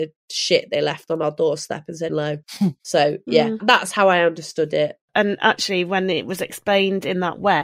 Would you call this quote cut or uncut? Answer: cut